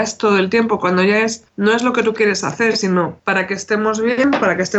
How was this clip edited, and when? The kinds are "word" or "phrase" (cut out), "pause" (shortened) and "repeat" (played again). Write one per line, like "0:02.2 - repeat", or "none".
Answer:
0:01.5 - pause
0:03.2 - pause